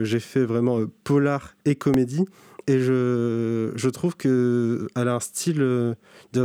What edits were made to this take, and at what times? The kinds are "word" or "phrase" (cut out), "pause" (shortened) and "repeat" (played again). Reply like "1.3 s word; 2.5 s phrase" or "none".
1.6 s pause